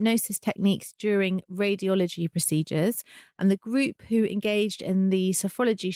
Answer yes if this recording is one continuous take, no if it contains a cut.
yes